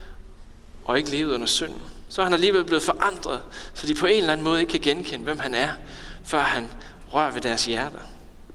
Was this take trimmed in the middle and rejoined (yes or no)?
no